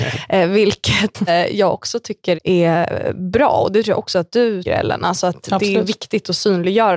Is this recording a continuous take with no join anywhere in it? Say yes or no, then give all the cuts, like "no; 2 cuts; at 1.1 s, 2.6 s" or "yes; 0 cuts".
no; 3 cuts; at 1.3 s, 2.3 s, 4.6 s